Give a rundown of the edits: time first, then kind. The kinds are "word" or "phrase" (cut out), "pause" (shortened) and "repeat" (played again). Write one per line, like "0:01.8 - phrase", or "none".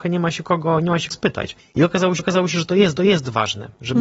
0:01.1 - word
0:01.6 - pause
0:02.2 - repeat
0:03.0 - repeat